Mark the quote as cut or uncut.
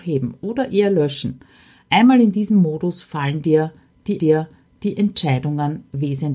cut